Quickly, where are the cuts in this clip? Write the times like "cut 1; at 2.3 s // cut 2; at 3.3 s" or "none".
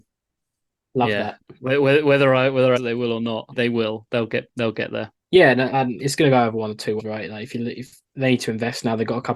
cut 1; at 2.8 s // cut 2; at 3.5 s // cut 3; at 5.2 s // cut 4; at 6.0 s // cut 5; at 7.0 s